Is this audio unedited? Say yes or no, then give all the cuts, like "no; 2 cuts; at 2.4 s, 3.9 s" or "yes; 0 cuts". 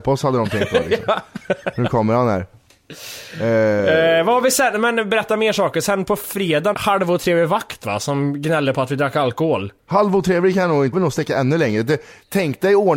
no; 3 cuts; at 6.7 s, 9.8 s, 10.9 s